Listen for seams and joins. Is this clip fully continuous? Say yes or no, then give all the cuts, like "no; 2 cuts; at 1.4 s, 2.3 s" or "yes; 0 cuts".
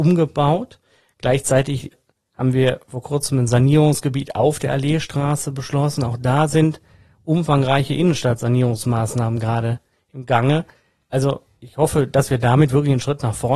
yes; 0 cuts